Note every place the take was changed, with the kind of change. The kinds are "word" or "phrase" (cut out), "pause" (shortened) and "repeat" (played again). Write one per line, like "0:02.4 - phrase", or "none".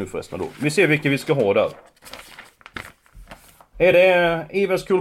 none

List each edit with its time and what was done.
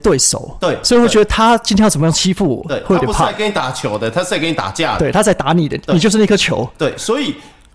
none

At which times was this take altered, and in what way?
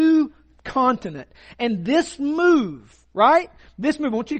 none

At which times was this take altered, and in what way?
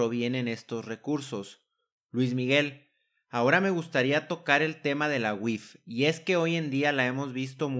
none

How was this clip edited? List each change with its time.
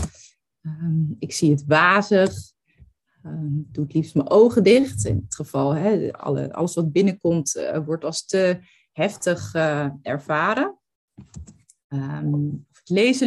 none

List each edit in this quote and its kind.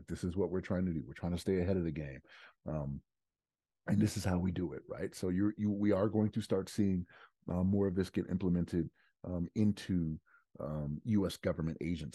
none

